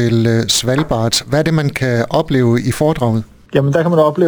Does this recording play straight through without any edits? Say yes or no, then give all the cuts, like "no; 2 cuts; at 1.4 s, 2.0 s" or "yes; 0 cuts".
yes; 0 cuts